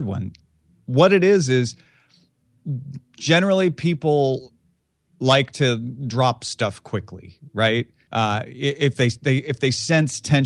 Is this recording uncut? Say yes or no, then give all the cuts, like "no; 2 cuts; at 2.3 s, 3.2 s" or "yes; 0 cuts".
no; 1 cut; at 8.1 s